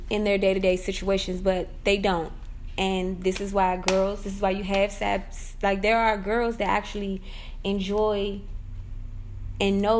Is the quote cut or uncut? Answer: uncut